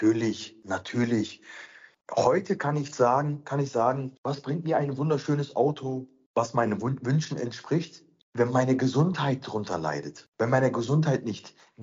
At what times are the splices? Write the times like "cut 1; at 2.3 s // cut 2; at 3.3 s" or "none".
cut 1; at 4.2 s